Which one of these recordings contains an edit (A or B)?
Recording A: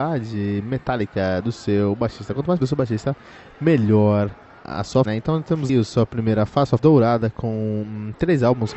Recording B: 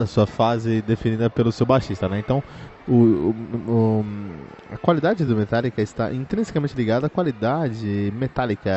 A